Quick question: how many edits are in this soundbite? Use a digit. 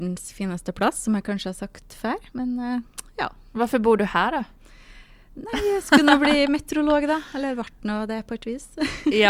0